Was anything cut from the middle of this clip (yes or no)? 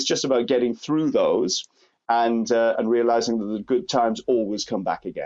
no